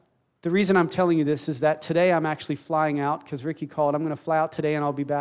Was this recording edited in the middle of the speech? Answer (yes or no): no